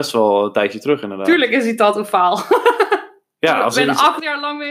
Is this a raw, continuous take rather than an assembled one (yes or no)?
yes